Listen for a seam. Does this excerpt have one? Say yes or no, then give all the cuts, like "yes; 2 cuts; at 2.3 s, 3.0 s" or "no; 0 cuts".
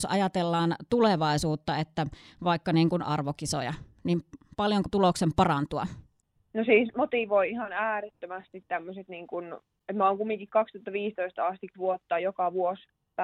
yes; 3 cuts; at 3.0 s, 4.9 s, 11.7 s